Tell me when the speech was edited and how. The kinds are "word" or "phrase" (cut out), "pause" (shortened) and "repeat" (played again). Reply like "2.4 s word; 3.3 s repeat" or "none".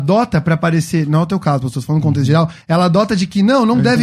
2.6 s pause

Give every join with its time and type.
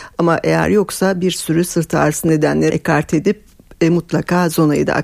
2.7 s word

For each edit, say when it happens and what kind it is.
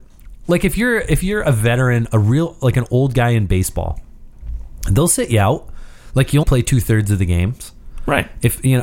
6.4 s word

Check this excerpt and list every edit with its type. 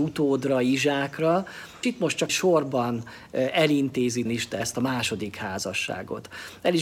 1.8 s word; 2.3 s word; 4.3 s word; 4.6 s word

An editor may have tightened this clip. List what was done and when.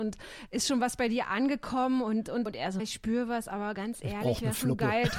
2.5 s word; 2.8 s word

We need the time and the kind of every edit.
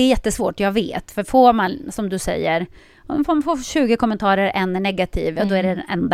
none

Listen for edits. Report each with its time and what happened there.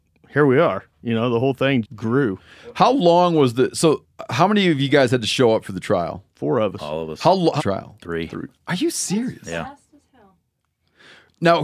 1.8 s word; 6.3 s pause; 7.6 s phrase; 8.6 s pause

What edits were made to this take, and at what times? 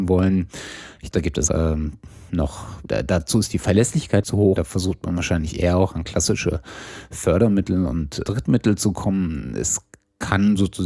1.1 s word; 1.5 s word; 2.9 s word; 4.2 s word; 4.6 s word; 8.2 s word

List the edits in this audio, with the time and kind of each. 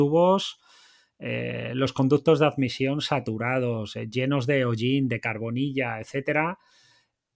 none

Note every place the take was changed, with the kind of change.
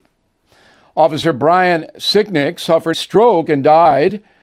2.9 s word

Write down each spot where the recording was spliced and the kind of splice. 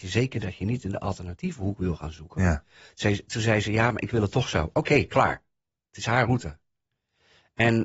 none

